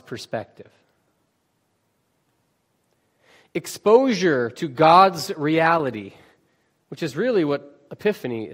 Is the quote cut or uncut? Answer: uncut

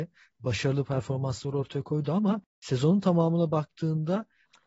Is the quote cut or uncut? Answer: cut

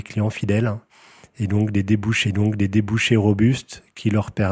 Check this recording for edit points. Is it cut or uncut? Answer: cut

